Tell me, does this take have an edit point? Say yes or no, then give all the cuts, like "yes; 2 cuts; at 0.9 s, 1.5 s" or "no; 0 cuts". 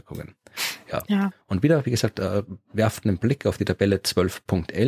yes; 1 cut; at 1.4 s